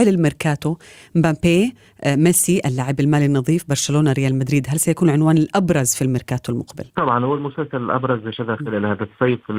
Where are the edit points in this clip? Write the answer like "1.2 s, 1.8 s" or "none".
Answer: 6.9 s